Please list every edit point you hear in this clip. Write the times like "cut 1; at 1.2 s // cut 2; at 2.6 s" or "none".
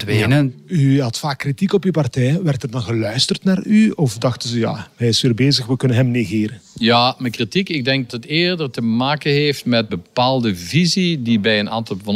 cut 1; at 8.1 s // cut 2; at 9.9 s